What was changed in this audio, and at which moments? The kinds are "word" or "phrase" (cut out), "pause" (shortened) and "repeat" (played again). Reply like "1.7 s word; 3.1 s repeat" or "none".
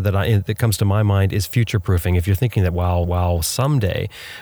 3.0 s repeat